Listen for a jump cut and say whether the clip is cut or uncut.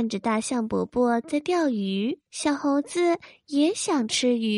cut